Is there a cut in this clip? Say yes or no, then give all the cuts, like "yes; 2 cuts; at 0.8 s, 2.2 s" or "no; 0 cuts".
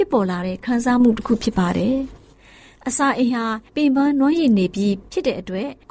no; 0 cuts